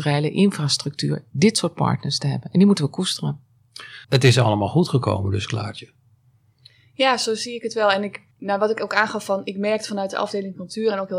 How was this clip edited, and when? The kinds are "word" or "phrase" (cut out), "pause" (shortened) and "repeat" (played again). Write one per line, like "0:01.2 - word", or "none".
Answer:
0:04.0 - pause
0:08.3 - pause